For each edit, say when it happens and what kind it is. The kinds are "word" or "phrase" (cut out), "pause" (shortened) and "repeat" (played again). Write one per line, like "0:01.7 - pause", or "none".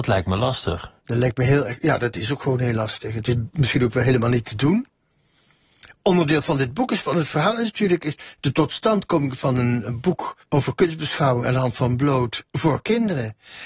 0:01.0 - pause
0:10.4 - pause